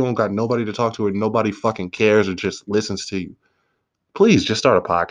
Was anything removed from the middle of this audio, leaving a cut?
no; 0 cuts

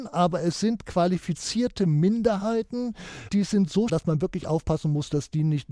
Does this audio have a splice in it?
yes; 2 cuts; at 3.3 s, 3.9 s

